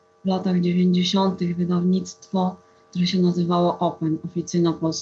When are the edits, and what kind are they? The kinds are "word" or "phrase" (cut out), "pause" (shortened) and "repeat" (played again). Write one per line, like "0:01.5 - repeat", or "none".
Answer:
none